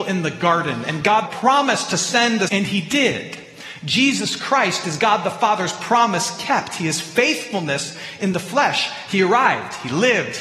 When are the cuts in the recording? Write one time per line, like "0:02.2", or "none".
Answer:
0:01.3
0:02.5